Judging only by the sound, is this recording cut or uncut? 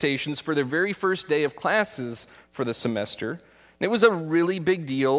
uncut